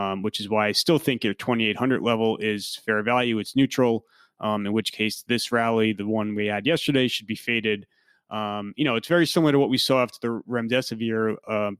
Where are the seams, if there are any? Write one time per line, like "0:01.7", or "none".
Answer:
none